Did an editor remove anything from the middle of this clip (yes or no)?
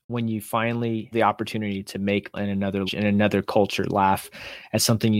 yes